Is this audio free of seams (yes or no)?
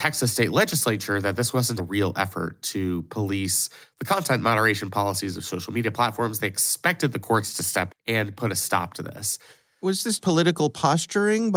no